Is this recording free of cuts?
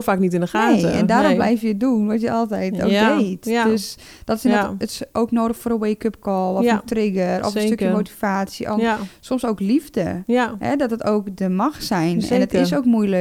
yes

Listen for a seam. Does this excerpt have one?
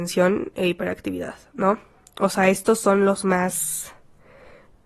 no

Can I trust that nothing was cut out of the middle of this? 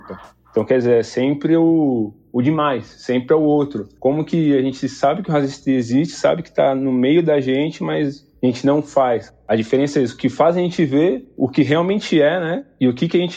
yes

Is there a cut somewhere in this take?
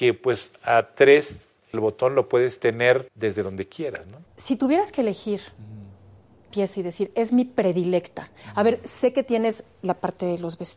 yes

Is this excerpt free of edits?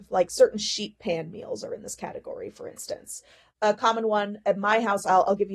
yes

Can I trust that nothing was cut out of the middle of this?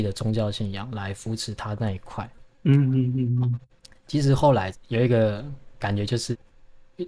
yes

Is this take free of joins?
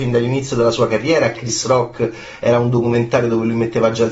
no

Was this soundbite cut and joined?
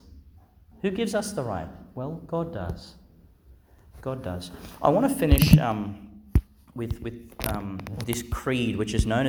no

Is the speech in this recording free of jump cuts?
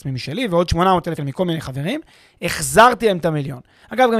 no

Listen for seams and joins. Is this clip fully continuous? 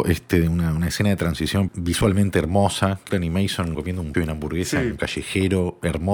no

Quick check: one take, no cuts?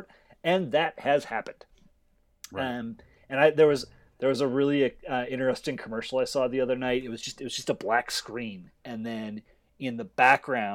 yes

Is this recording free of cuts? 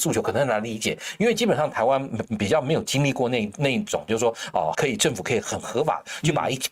no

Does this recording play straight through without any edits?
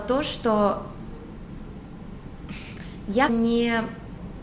no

